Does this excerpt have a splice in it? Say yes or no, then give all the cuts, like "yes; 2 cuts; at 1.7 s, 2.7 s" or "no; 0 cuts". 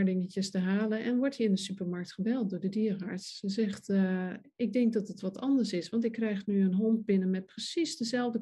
no; 0 cuts